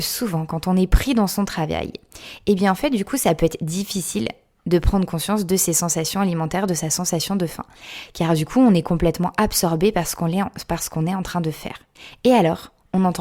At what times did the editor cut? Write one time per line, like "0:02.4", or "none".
none